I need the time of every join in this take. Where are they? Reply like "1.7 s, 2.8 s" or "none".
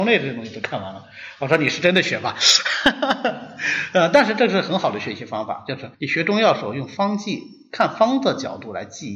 5.9 s